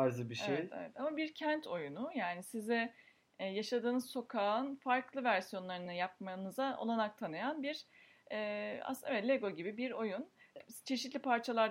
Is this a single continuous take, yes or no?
yes